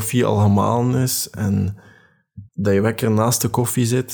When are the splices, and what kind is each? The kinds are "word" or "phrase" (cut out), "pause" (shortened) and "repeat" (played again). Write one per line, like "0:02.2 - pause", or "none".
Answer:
0:02.5 - pause